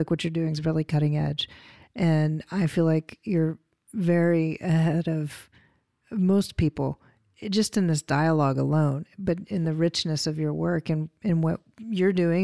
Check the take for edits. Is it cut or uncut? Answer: uncut